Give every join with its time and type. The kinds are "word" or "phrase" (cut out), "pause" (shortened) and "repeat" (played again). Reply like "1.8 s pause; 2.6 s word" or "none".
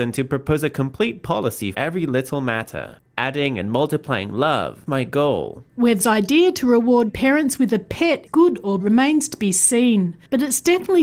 1.7 s word; 4.9 s word; 6.0 s word; 7.1 s word; 8.3 s word; 8.8 s word